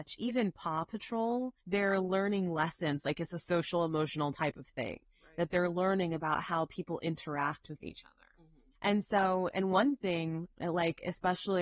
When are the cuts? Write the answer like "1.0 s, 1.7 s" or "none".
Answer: 1.6 s, 8.7 s, 10.5 s